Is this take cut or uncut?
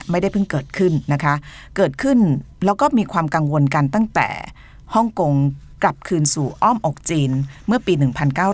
cut